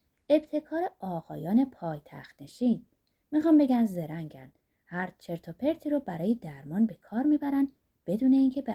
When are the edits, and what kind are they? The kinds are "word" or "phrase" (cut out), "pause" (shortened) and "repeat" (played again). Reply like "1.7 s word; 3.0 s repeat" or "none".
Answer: none